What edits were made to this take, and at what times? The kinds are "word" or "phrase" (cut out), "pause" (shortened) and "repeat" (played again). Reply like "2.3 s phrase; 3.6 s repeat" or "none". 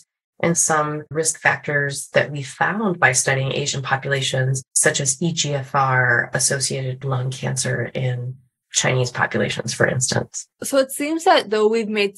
1.1 s word; 4.7 s pause; 7.0 s word; 10.5 s pause